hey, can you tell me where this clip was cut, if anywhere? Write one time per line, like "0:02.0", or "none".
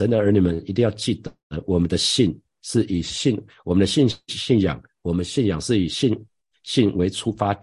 none